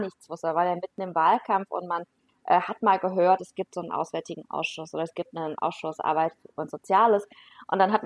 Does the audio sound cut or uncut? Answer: uncut